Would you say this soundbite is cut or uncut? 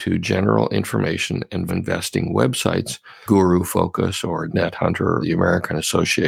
cut